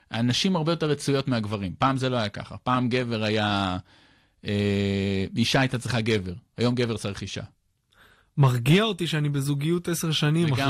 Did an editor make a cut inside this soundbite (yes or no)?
no